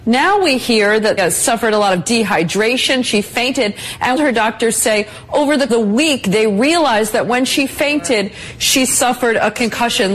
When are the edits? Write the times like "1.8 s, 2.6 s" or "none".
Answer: 1.2 s, 4.2 s, 5.7 s